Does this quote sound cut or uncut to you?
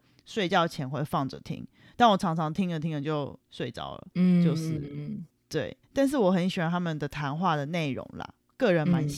cut